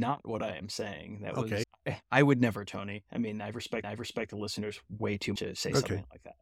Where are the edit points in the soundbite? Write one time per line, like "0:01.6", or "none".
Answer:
0:03.8
0:05.4